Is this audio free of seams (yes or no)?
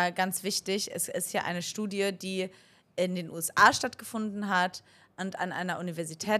yes